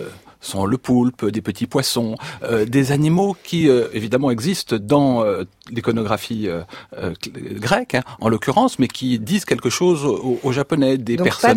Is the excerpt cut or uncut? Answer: uncut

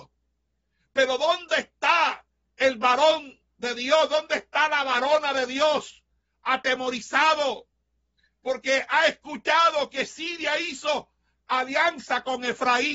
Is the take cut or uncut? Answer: uncut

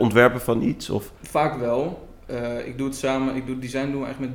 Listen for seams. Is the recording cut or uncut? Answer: cut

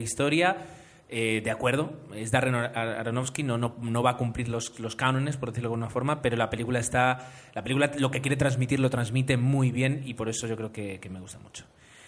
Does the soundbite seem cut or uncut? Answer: uncut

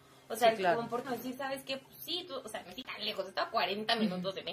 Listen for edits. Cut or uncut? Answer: cut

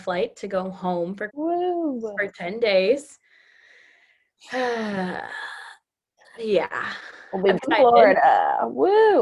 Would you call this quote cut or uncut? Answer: cut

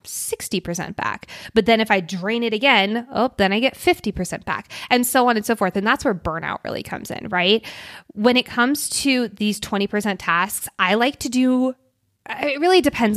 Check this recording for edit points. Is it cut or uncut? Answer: uncut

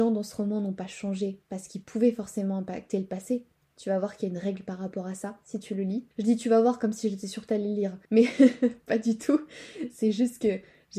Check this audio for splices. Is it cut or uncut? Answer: cut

